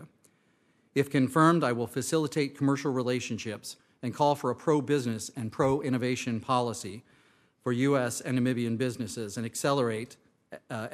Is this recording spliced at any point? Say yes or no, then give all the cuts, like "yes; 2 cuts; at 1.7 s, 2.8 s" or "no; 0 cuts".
no; 0 cuts